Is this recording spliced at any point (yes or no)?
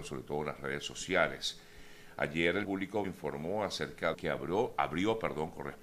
yes